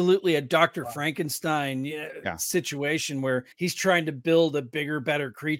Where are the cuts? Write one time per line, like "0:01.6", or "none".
0:03.5

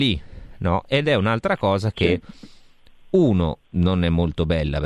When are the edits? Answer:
0:03.6

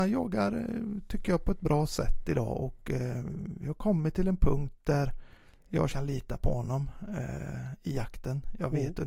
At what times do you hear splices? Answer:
0:05.9

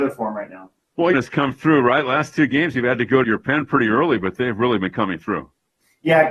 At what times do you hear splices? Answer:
0:01.1
0:03.2

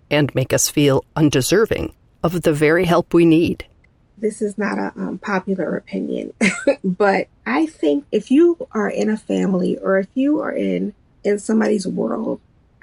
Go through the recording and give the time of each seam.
none

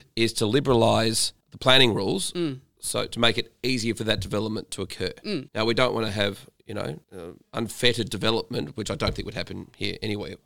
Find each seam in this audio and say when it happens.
0:01.4
0:05.5
0:07.0

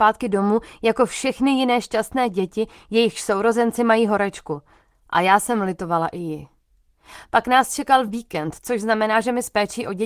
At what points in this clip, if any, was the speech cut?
none

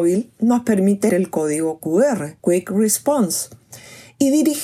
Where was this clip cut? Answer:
0:01.1
0:02.4

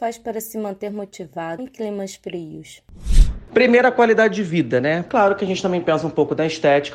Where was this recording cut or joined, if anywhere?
0:01.6

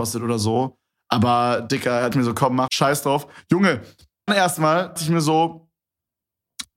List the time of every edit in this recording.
0:02.1
0:02.7
0:04.3
0:05.0

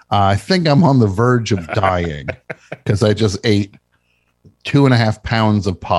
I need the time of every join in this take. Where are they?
none

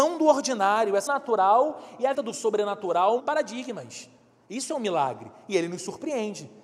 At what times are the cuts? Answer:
0:01.1
0:02.1
0:03.2

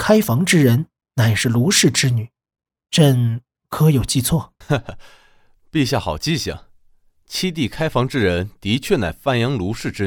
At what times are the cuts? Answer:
0:04.6

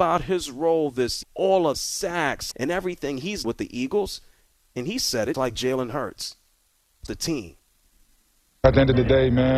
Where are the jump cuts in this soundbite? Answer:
0:01.2
0:01.7
0:02.5
0:03.4
0:05.3
0:07.1

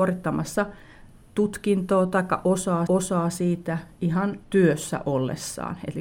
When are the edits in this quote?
0:02.9
0:04.4

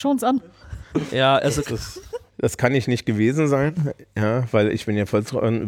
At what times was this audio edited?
0:02.3

